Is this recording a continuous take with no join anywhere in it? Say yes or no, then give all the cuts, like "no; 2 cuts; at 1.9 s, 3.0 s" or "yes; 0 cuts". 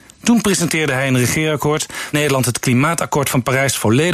no; 1 cut; at 2.1 s